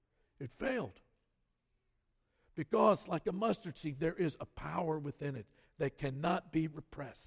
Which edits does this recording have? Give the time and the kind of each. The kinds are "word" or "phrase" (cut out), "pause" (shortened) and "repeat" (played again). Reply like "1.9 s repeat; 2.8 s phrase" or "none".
none